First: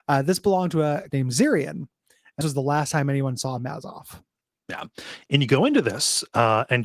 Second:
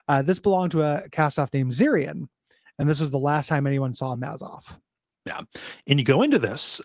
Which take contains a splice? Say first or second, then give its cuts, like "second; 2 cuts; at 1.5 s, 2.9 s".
first; 2 cuts; at 1.1 s, 2.4 s